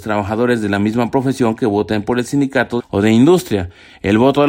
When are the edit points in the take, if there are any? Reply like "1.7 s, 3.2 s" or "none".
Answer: 2.8 s